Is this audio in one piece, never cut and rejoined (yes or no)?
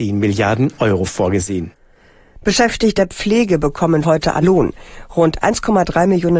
no